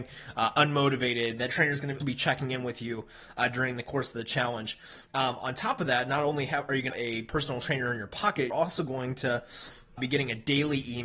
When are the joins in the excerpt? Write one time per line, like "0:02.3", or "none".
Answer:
0:02.0
0:06.9
0:08.5
0:10.0